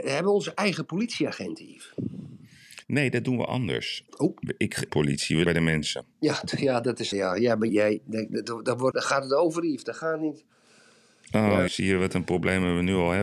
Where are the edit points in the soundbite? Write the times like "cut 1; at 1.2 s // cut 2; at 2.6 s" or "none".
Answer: cut 1; at 4.1 s // cut 2; at 4.9 s // cut 3; at 5.4 s // cut 4; at 6.1 s // cut 5; at 7.1 s // cut 6; at 7.7 s // cut 7; at 8.9 s // cut 8; at 11.7 s